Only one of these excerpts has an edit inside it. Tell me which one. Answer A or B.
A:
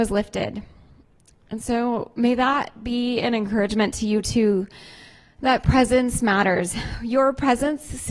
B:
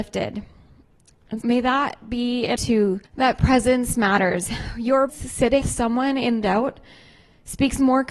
B